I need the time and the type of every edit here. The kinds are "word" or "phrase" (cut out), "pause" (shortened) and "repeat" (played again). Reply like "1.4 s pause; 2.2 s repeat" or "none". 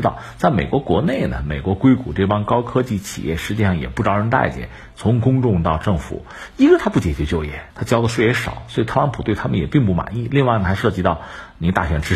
7.7 s phrase